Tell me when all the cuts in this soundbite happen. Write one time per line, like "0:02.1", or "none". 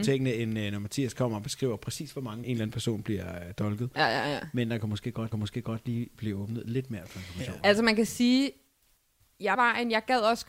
0:02.4
0:05.3
0:09.5